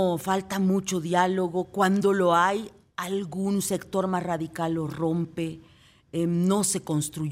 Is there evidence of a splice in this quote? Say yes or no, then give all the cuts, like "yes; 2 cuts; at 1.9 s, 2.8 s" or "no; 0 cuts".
no; 0 cuts